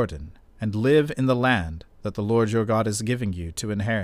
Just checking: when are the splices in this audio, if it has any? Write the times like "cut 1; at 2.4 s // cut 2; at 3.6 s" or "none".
none